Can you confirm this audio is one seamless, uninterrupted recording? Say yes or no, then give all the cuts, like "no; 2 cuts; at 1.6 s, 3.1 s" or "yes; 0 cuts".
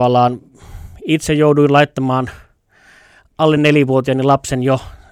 yes; 0 cuts